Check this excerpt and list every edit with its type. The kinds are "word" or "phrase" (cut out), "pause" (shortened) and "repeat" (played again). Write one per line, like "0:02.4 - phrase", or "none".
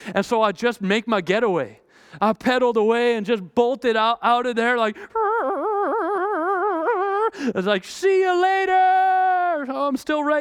none